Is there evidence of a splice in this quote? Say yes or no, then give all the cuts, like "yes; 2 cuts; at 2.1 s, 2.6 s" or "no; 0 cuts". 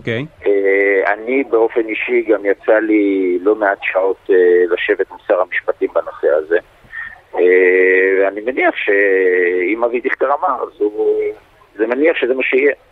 no; 0 cuts